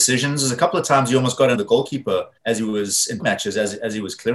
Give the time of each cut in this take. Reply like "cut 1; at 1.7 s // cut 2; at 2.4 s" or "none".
cut 1; at 1.5 s // cut 2; at 2.4 s // cut 3; at 3.2 s